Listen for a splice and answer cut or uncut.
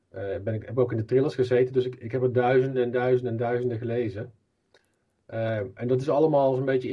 uncut